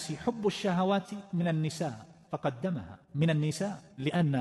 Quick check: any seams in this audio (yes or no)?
no